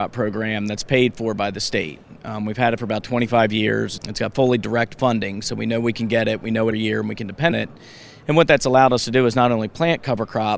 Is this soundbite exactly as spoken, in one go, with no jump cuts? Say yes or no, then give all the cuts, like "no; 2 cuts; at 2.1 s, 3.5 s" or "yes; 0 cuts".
no; 2 cuts; at 6.7 s, 7.5 s